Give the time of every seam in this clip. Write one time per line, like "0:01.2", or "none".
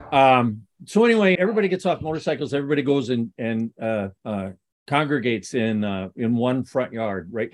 0:01.3
0:04.2

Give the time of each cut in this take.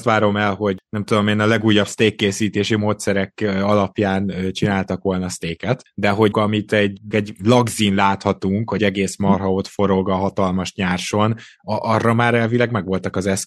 0:06.3
0:07.1
0:08.8

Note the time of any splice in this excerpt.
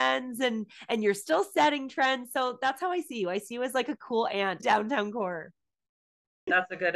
0:04.6

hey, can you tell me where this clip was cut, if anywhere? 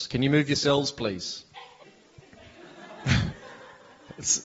0:01.8

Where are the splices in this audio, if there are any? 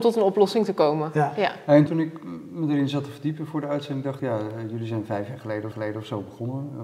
0:01.9
0:04.2
0:05.7

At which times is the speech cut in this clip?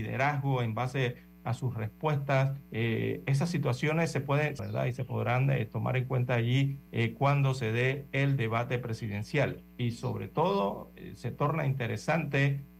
0:02.6
0:04.6
0:06.9

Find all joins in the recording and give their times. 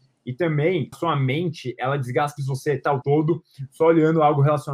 0:00.9
0:02.4
0:03.0

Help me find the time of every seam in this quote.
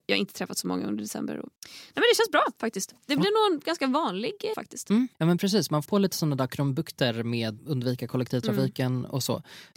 0:01.6
0:03.0
0:04.5
0:05.1
0:05.8
0:07.6

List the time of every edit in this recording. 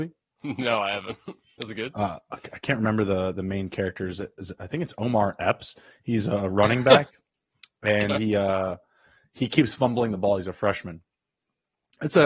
none

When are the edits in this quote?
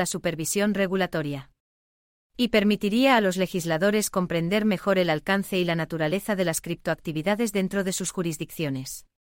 none

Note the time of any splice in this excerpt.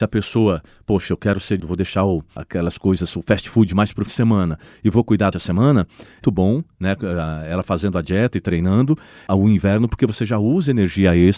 0:01.6
0:02.4
0:04.1
0:05.3
0:06.2
0:09.3

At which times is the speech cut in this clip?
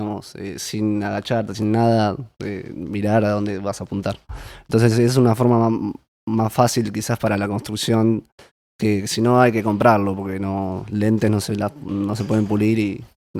none

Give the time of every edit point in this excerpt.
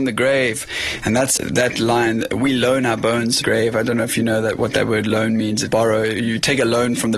0:01.4
0:03.4
0:05.7

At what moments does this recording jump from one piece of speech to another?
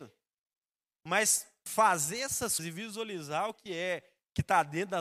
0:02.6
0:03.5

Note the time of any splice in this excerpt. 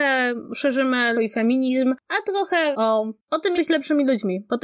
0:01.1
0:02.7
0:03.2
0:03.5

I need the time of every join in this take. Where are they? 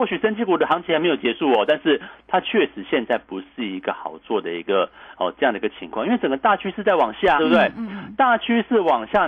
0:07.4

